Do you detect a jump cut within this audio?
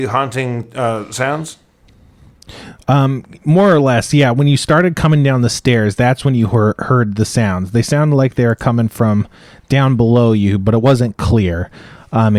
no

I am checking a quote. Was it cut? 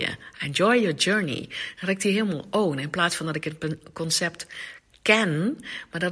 no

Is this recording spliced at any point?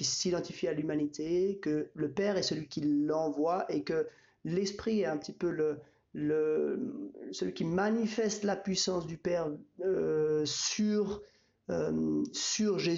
no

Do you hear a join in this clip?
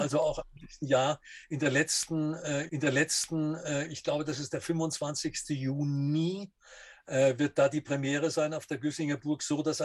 yes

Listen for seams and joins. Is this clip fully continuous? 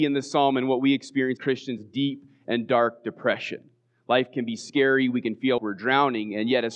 no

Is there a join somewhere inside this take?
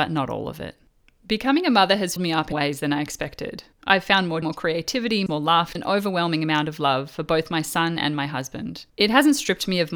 yes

